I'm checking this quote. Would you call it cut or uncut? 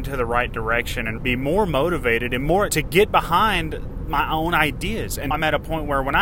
cut